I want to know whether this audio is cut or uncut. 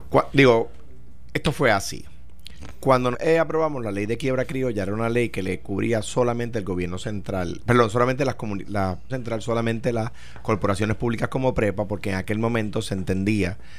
cut